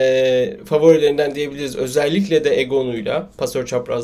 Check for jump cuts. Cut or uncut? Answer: uncut